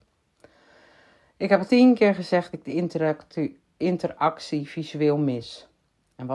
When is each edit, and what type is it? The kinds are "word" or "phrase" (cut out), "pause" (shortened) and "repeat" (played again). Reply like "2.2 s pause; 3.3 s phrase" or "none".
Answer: 1.7 s phrase; 2.5 s word

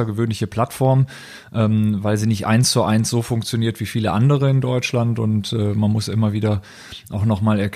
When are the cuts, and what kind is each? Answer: none

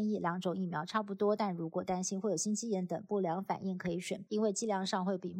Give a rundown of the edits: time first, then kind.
4.3 s word

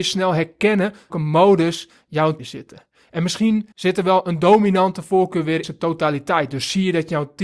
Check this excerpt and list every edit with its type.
1.1 s word; 2.4 s word; 3.7 s pause; 5.6 s word

